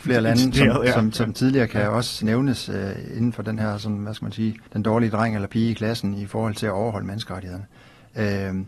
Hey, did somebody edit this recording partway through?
yes; 1 cut; at 4.7 s

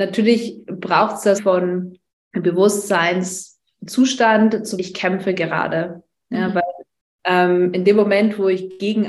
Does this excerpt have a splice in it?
yes; 3 cuts; at 1.4 s, 2.1 s, 4.8 s

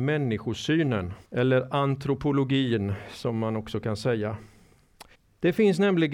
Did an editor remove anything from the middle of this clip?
yes; 2 cuts; at 1.2 s, 5.1 s

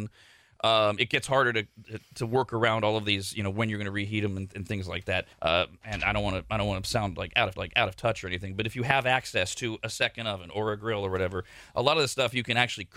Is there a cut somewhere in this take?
yes; 3 cuts; at 2.0 s, 5.3 s, 7.6 s

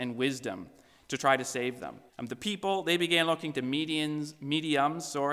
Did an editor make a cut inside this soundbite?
yes; 1 cut; at 2.1 s

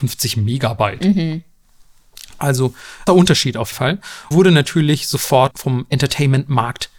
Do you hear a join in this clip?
yes; 4 cuts; at 3.1 s, 3.7 s, 4.3 s, 5.5 s

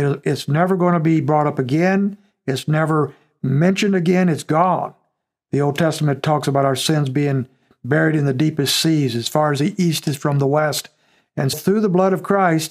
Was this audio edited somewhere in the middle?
yes; 1 cut; at 11.5 s

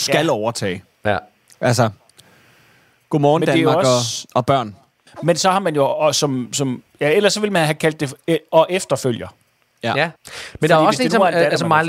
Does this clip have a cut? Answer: yes; 1 cut; at 10.2 s

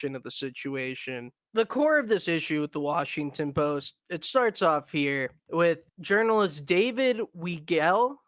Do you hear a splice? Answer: no; 0 cuts

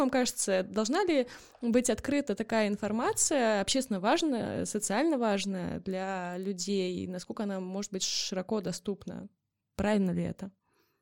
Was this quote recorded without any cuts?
yes; 0 cuts

